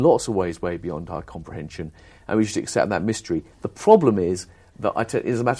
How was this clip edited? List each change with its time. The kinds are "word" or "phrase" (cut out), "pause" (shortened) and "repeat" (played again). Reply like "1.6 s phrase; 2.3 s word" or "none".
none